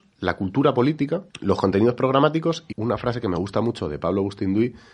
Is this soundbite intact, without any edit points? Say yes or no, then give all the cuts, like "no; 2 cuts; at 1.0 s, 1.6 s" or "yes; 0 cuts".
no; 2 cuts; at 1.3 s, 2.7 s